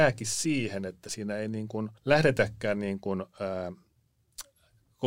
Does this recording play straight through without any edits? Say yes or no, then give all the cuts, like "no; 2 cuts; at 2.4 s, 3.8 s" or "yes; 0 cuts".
no; 1 cut; at 2.0 s